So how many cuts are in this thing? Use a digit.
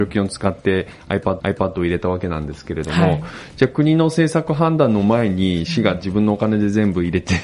1